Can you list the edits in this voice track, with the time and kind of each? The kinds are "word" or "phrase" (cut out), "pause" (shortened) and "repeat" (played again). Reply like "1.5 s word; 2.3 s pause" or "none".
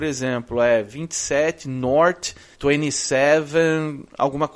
2.5 s word